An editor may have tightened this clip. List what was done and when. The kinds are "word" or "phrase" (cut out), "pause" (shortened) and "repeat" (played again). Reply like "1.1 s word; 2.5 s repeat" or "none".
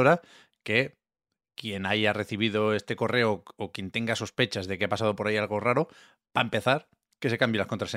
none